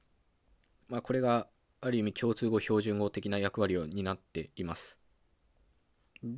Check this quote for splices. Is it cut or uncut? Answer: uncut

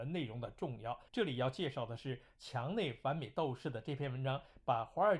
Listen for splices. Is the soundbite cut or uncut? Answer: cut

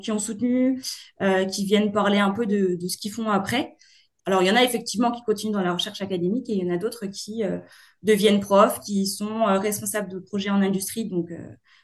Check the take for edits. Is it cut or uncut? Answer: uncut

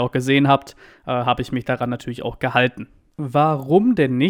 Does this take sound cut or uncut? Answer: uncut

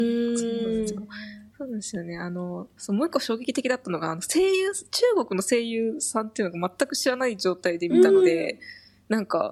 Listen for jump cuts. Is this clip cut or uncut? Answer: cut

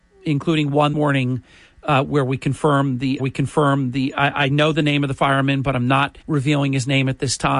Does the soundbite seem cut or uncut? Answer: cut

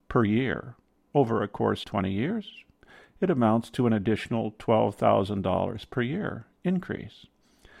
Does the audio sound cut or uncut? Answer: cut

